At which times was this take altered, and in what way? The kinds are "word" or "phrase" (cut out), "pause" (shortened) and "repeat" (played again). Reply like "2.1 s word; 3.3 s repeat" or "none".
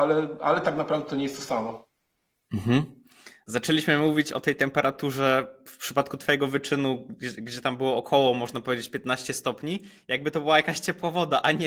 none